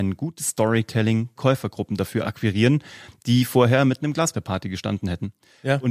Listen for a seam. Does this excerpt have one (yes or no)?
yes